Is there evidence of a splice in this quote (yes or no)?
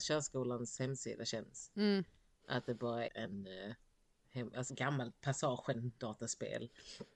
yes